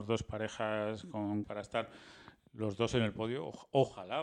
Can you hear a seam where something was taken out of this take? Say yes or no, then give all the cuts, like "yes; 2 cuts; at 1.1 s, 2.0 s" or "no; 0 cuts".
yes; 1 cut; at 1.4 s